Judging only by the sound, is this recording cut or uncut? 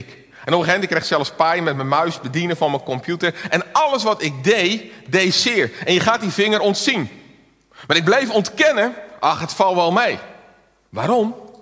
uncut